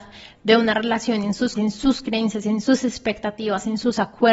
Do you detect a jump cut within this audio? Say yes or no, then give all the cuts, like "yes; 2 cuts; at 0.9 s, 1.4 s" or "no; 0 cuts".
yes; 1 cut; at 1.5 s